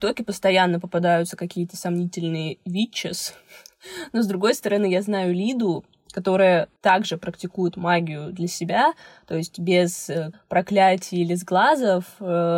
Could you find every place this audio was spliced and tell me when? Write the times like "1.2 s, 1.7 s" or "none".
10.3 s